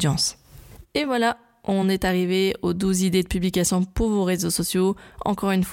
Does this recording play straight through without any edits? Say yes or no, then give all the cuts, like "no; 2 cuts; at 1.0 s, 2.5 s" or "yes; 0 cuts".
yes; 0 cuts